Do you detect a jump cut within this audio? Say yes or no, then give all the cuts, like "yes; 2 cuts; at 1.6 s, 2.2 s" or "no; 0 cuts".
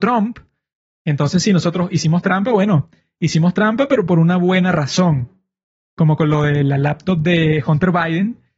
no; 0 cuts